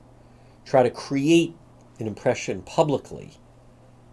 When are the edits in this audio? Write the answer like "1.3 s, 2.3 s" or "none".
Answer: none